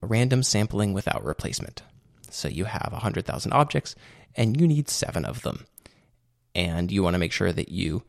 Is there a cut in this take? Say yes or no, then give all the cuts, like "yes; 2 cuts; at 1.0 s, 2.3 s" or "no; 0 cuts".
no; 0 cuts